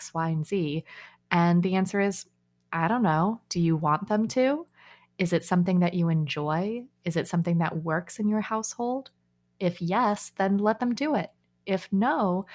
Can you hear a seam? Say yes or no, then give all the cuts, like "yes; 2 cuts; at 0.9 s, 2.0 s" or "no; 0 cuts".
no; 0 cuts